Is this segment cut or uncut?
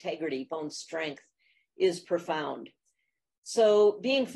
uncut